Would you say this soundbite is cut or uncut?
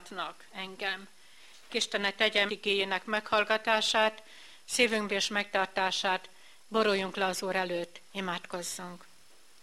cut